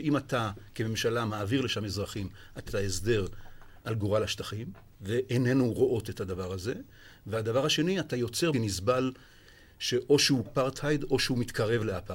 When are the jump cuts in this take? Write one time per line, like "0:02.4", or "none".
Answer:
0:02.7
0:03.8
0:08.5
0:10.5